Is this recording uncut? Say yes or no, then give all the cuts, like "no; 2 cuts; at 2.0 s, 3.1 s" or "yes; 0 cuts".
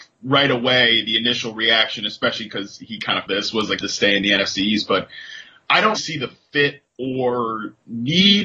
no; 3 cuts; at 3.3 s, 3.8 s, 6.0 s